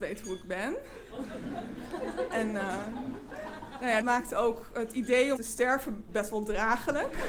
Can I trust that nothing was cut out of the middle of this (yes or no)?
no